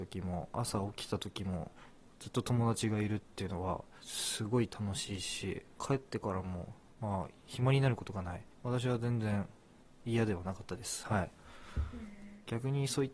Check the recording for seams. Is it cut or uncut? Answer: cut